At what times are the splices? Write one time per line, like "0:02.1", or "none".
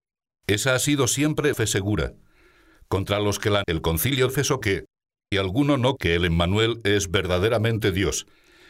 0:01.5
0:03.6
0:04.3
0:04.6
0:05.3
0:06.0